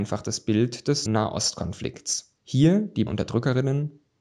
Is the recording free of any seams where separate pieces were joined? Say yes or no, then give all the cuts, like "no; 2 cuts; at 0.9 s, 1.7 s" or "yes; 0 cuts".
no; 3 cuts; at 1.1 s, 2.4 s, 3.1 s